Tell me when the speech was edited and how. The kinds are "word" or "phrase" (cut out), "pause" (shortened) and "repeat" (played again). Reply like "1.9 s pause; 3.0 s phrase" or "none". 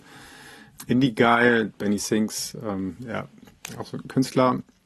none